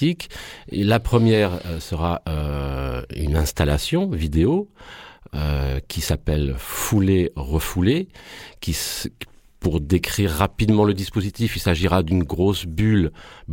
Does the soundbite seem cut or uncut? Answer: uncut